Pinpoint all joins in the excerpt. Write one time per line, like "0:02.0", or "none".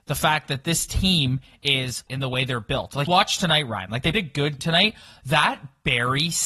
0:02.1
0:03.1
0:04.1
0:04.6